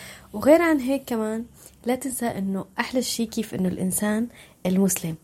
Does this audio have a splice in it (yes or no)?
no